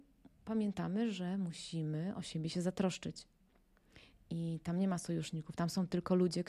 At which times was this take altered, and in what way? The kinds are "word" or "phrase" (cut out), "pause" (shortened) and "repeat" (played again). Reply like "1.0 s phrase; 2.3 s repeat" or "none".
none